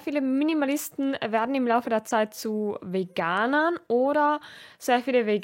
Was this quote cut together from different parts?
no; 0 cuts

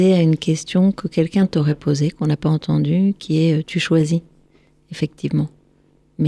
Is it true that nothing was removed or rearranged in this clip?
yes; 0 cuts

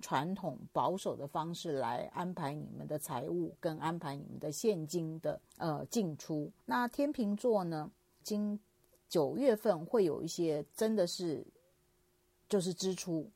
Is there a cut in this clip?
yes; 3 cuts; at 5.5 s, 6.6 s, 8.2 s

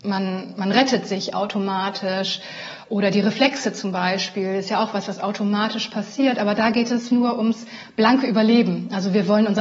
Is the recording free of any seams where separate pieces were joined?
no; 1 cut; at 7.1 s

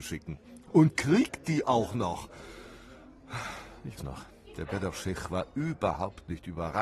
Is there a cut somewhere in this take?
yes; 1 cut; at 4.0 s

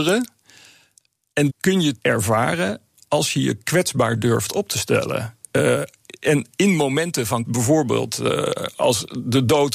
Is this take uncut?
no; 3 cuts; at 1.5 s, 2.0 s, 7.4 s

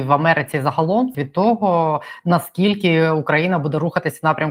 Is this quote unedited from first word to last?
no; 1 cut; at 1.1 s

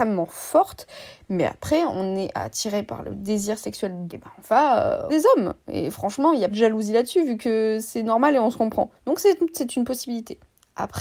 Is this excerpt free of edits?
no; 5 cuts; at 4.1 s, 5.1 s, 6.5 s, 9.0 s, 9.5 s

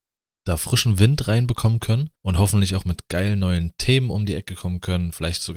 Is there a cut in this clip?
yes; 1 cut; at 2.2 s

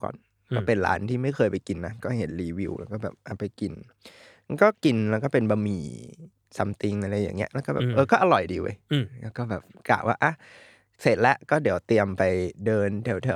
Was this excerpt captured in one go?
yes; 0 cuts

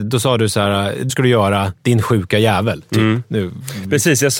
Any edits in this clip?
yes; 1 cut; at 1.1 s

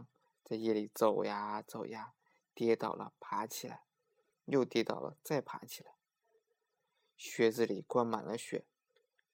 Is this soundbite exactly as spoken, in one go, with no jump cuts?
yes; 0 cuts

